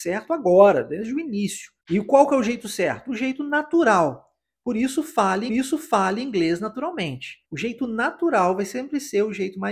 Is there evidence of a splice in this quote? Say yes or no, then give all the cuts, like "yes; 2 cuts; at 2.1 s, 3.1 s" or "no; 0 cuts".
yes; 3 cuts; at 1.8 s, 5.5 s, 7.4 s